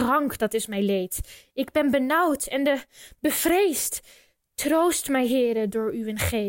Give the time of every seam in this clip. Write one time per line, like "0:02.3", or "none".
none